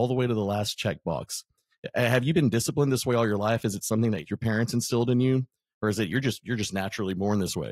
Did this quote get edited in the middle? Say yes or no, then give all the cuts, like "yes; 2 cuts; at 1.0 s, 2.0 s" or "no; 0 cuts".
no; 0 cuts